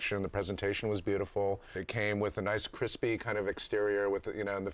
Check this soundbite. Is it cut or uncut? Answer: uncut